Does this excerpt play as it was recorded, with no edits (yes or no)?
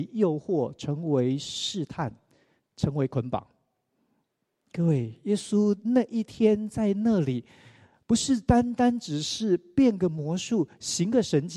yes